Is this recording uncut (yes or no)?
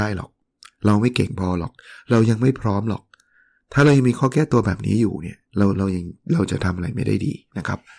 no